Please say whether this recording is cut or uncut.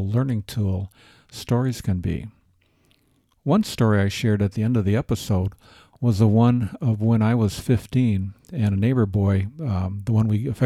uncut